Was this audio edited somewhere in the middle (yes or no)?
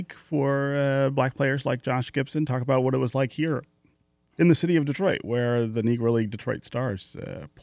no